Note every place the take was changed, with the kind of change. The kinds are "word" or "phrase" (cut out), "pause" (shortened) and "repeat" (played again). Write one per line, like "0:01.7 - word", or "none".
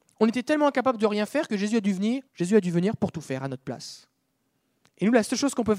0:02.3 - pause